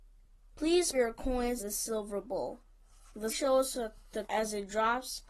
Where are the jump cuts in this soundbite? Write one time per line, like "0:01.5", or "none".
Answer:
0:00.9
0:01.6
0:03.3
0:04.2